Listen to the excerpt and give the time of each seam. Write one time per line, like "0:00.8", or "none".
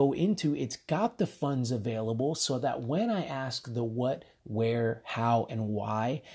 0:04.4